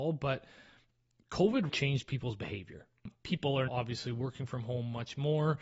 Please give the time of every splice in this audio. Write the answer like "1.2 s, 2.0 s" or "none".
1.7 s, 3.1 s, 3.7 s